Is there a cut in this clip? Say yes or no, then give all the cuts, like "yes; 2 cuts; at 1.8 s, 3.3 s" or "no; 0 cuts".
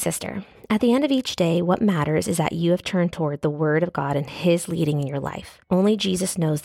yes; 1 cut; at 5.6 s